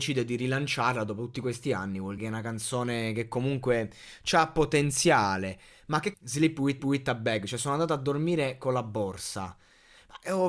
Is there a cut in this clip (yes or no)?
yes